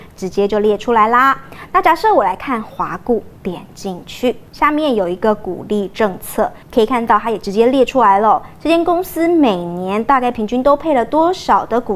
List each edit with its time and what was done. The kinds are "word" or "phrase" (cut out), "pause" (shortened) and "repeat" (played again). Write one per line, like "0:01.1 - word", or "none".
0:03.4 - pause
0:04.5 - pause
0:06.6 - pause